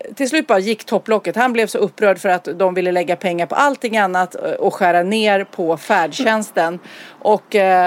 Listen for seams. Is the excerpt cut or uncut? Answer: uncut